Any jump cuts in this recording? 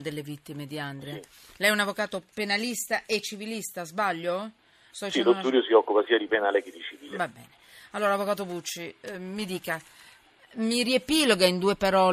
no; 0 cuts

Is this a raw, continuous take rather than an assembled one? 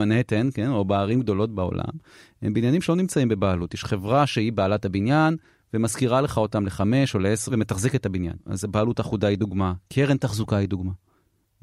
no; 1 cut; at 7.5 s

